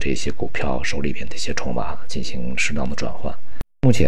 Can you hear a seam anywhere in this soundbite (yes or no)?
no